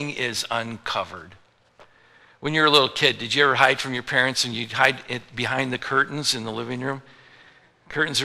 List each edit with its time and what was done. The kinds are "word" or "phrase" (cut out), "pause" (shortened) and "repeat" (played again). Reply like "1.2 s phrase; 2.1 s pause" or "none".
none